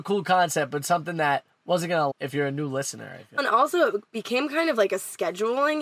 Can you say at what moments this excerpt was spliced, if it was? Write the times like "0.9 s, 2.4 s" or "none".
2.1 s, 3.4 s